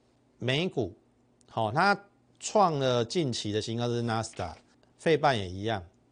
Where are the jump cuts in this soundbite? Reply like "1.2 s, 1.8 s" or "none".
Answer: 1.2 s, 2.3 s, 4.7 s